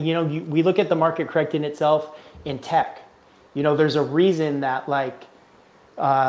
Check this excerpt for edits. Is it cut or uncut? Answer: uncut